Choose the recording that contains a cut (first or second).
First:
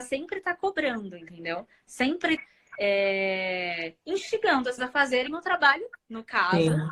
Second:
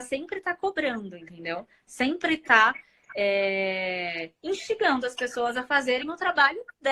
first